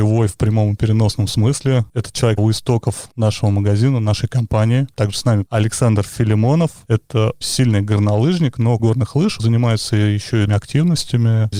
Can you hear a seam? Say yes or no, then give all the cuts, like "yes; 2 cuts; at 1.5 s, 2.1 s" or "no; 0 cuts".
yes; 6 cuts; at 2.4 s, 5.5 s, 7.4 s, 8.8 s, 9.4 s, 10.5 s